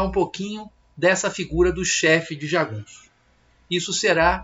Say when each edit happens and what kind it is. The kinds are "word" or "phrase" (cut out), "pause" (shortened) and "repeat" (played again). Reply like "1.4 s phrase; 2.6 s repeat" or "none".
none